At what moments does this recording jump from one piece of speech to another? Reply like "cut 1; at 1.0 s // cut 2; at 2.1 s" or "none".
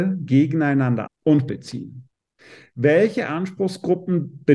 cut 1; at 1.1 s // cut 2; at 1.5 s